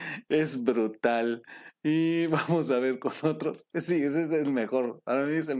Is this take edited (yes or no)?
no